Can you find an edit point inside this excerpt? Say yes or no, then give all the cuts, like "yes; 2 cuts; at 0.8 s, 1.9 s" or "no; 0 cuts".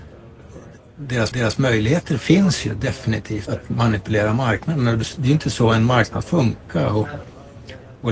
yes; 3 cuts; at 1.3 s, 3.5 s, 6.2 s